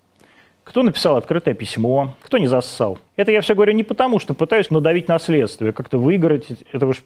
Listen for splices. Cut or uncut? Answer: cut